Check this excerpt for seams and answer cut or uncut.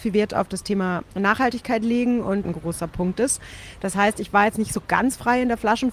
cut